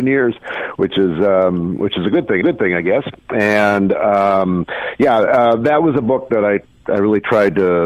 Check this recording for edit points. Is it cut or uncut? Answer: cut